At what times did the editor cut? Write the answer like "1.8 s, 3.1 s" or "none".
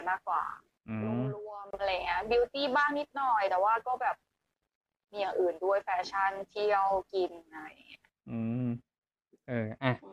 none